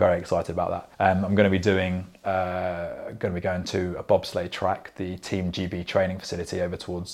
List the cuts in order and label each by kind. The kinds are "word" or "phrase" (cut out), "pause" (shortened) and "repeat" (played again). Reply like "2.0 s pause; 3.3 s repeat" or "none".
0.9 s pause